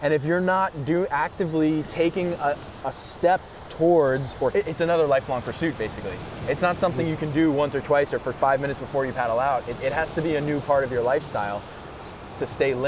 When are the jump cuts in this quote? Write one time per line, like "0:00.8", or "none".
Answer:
0:02.8
0:04.5
0:09.8